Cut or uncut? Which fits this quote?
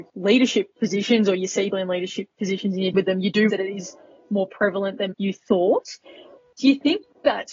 cut